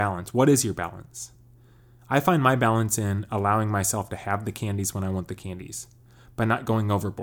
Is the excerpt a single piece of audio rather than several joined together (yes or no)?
yes